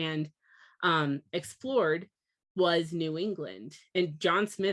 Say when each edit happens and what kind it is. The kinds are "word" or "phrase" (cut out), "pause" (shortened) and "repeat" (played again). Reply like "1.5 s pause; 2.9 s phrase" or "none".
none